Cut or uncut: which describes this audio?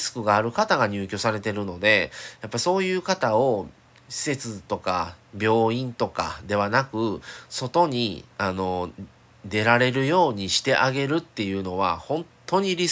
cut